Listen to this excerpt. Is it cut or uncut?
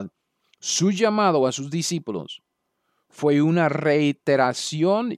uncut